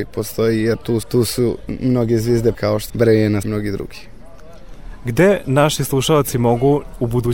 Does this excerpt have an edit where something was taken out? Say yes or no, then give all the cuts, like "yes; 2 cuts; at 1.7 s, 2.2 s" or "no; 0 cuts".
yes; 4 cuts; at 1.0 s, 2.5 s, 2.9 s, 3.4 s